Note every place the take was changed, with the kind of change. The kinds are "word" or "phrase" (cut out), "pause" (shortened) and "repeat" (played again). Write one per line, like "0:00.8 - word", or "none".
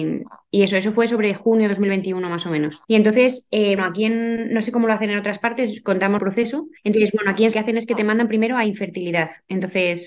0:02.8 - pause
0:03.8 - word
0:06.2 - word
0:06.8 - pause
0:07.5 - phrase